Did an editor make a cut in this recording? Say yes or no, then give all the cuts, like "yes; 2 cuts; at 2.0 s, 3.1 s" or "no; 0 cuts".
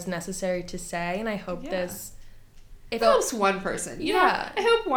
yes; 1 cut; at 3.0 s